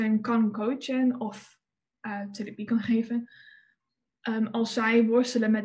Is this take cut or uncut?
uncut